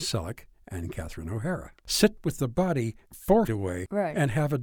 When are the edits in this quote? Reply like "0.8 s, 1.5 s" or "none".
2.2 s, 3.5 s